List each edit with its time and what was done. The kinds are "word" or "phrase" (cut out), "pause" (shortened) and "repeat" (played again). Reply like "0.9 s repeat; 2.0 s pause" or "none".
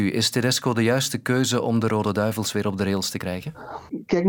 none